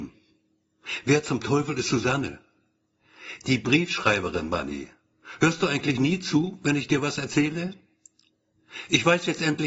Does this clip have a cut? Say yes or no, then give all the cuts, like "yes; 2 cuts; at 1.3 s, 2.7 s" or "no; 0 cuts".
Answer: no; 0 cuts